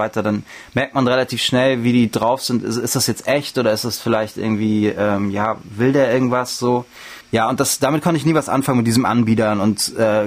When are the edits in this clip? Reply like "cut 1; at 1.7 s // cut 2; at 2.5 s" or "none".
none